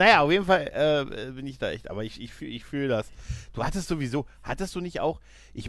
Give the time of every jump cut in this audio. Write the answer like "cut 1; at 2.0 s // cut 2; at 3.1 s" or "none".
none

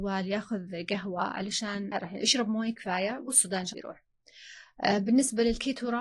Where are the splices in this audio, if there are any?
cut 1; at 1.9 s // cut 2; at 3.7 s

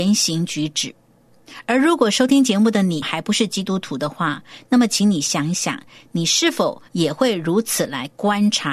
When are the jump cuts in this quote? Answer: cut 1; at 6.9 s

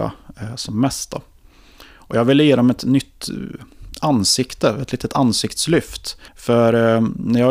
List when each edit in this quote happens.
cut 1; at 6.3 s

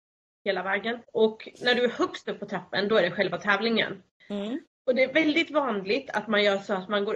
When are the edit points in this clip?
cut 1; at 1.0 s // cut 2; at 4.7 s

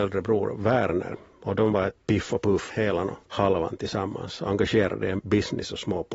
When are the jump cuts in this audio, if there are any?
cut 1; at 2.0 s // cut 2; at 2.7 s // cut 3; at 3.2 s // cut 4; at 5.2 s

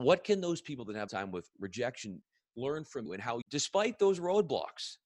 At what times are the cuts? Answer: cut 1; at 1.1 s // cut 2; at 3.1 s // cut 3; at 3.4 s

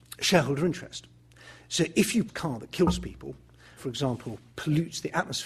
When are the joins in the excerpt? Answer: cut 1; at 2.3 s // cut 2; at 3.8 s

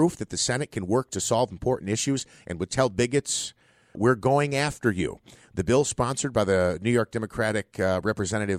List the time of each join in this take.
cut 1; at 3.9 s

